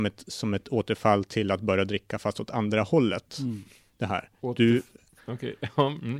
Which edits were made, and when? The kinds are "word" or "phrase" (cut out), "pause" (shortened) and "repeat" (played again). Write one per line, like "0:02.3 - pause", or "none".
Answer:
none